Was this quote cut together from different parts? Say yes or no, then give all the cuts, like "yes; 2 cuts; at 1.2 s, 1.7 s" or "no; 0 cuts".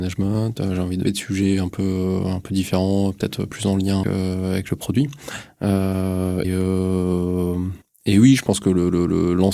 yes; 4 cuts; at 1.0 s, 4.0 s, 6.4 s, 7.8 s